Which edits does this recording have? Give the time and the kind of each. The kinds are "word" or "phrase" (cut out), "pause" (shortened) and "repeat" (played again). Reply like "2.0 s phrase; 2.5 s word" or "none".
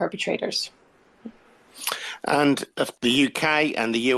2.9 s word